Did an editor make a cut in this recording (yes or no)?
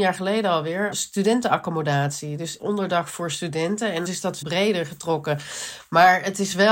yes